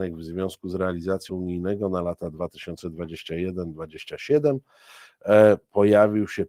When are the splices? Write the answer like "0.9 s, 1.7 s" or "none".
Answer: 1.3 s